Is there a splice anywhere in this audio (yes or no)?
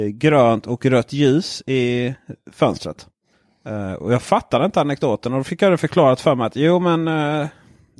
yes